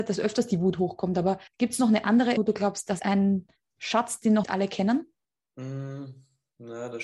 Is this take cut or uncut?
cut